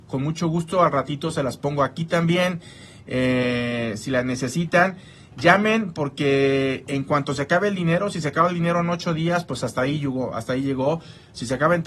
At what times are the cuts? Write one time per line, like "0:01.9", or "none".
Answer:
none